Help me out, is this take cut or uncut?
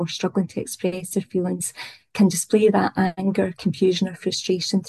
uncut